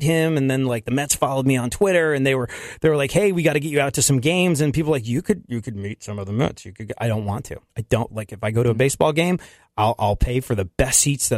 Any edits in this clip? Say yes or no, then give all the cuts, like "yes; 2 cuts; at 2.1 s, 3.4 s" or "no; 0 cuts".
yes; 1 cut; at 7.7 s